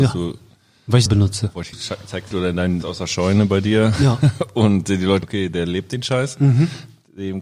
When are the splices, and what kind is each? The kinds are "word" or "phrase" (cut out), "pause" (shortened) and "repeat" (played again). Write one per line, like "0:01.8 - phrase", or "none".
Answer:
0:01.1 - word
0:01.7 - phrase
0:02.3 - phrase
0:02.8 - word
0:05.2 - word